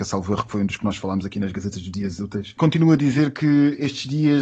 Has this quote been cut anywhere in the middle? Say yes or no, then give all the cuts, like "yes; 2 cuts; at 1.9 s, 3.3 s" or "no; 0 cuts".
no; 0 cuts